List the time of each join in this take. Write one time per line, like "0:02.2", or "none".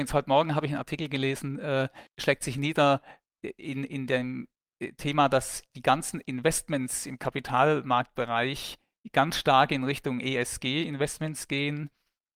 0:02.1